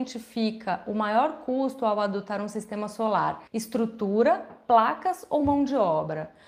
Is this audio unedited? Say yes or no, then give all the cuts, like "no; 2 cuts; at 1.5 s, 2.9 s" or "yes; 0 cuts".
yes; 0 cuts